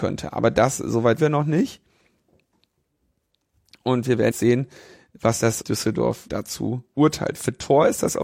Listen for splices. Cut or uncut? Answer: cut